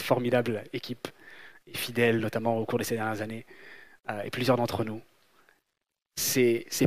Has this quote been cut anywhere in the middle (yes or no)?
no